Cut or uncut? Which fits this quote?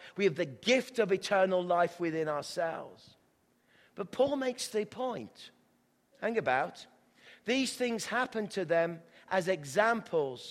uncut